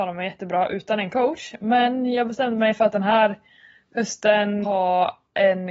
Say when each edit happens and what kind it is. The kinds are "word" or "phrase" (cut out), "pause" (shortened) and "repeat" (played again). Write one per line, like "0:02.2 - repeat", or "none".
0:04.6 - word